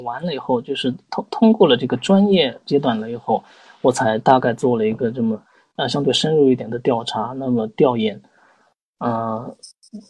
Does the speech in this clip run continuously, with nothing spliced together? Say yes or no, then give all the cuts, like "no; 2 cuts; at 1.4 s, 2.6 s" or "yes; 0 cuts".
yes; 0 cuts